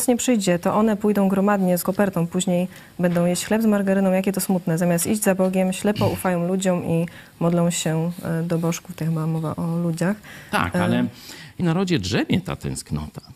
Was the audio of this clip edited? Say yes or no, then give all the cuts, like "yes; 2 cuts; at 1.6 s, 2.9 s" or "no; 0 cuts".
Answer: yes; 3 cuts; at 1.8 s, 9.5 s, 11.6 s